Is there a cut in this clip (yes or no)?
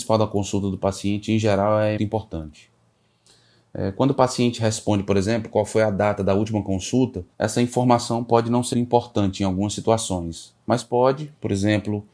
yes